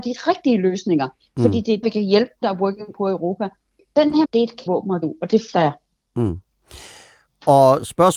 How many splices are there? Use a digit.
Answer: 6